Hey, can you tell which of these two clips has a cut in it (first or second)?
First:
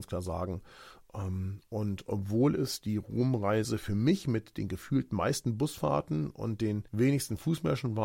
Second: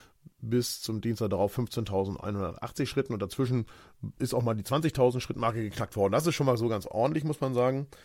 first